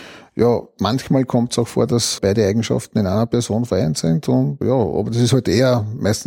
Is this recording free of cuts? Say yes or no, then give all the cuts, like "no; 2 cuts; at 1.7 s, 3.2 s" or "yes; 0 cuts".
no; 2 cuts; at 2.2 s, 4.6 s